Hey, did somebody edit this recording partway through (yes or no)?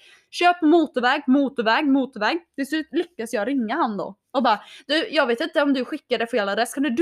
no